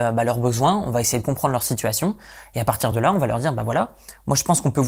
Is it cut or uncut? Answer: uncut